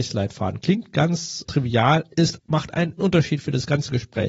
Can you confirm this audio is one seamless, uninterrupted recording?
no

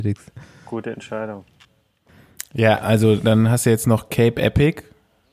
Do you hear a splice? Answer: no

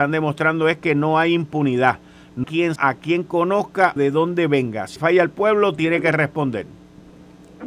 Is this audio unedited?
no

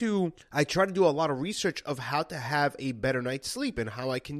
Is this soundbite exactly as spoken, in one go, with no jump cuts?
yes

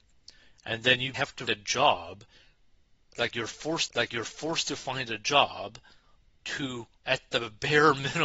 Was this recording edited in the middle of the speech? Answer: yes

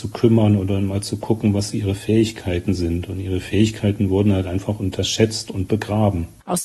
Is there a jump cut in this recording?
no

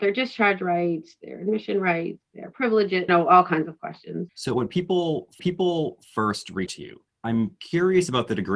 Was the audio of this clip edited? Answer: yes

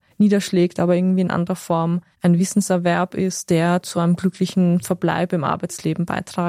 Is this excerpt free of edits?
yes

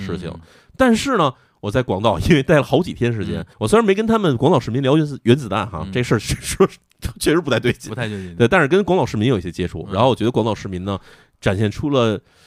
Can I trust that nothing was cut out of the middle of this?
no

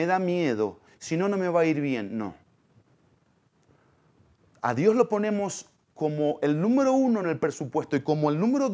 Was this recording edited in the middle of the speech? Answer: no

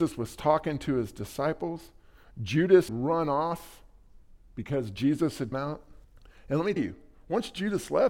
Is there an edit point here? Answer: yes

